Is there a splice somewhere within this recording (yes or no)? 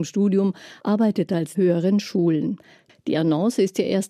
yes